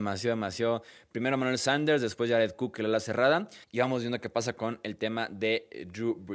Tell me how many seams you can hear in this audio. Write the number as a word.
one